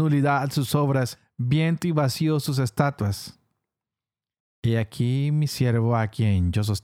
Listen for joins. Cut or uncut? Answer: uncut